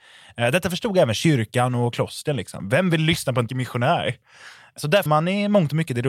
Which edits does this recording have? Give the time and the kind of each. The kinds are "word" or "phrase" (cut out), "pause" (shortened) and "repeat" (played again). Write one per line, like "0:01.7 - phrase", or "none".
0:03.5 - word
0:05.1 - word